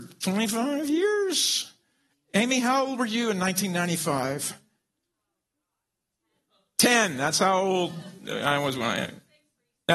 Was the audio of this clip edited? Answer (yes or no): no